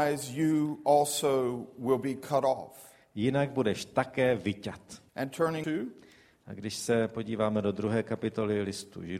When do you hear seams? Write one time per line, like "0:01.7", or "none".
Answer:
0:05.1
0:05.6

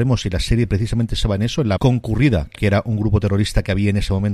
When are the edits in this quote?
0:01.8
0:02.5

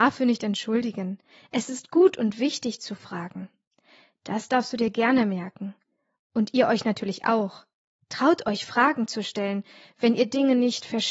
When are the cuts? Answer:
none

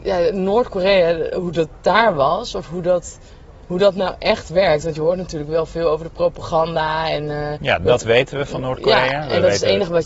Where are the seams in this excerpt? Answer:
none

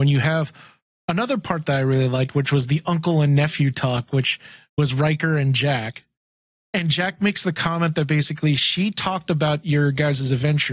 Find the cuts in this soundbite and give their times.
none

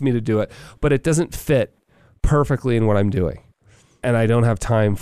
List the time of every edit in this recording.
none

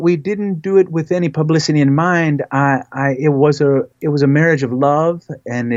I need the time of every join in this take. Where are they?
0:03.9

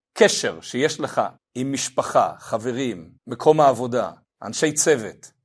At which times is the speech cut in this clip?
0:01.4
0:03.2
0:04.2

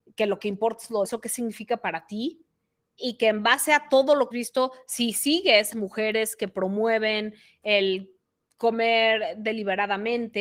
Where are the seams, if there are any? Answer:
0:01.0
0:04.3
0:05.7

